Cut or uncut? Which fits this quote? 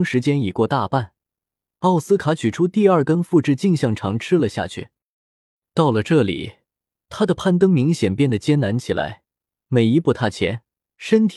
uncut